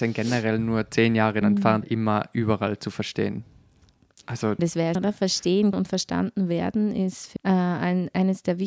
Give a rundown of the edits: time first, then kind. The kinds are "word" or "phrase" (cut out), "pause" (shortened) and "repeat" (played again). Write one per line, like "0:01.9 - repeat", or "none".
0:01.4 - word
0:01.8 - word
0:04.6 - word
0:05.0 - word
0:05.7 - word
0:07.4 - word